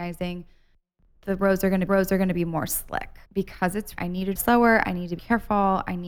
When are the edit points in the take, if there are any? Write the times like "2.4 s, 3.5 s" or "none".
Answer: 1.9 s, 3.2 s, 4.0 s, 4.4 s, 5.2 s